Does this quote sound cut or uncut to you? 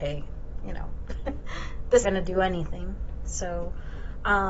cut